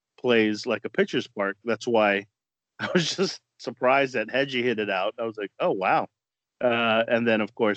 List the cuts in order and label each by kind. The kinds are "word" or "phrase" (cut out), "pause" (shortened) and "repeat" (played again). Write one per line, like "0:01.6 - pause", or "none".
none